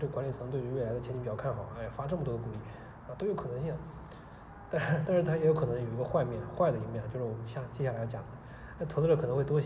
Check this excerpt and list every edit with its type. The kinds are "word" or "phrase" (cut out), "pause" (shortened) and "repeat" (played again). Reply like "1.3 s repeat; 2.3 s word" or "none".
none